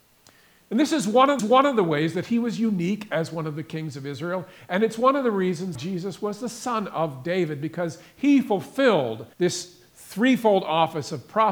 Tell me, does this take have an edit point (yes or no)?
yes